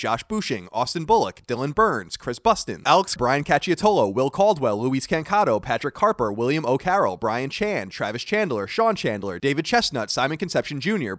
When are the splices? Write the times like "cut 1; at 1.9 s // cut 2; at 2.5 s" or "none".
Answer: cut 1; at 3.2 s